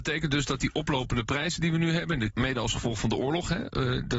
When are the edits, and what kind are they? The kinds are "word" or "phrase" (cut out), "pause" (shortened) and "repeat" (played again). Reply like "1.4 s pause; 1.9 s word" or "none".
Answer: 2.3 s word